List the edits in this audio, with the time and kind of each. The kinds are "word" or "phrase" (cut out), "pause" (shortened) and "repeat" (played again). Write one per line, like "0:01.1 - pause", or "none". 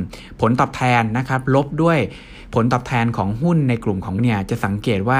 0:04.2 - word